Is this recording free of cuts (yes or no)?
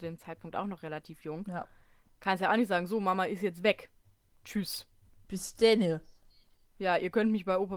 yes